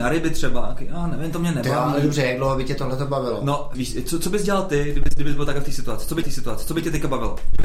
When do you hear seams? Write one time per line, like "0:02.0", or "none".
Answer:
0:03.7
0:06.2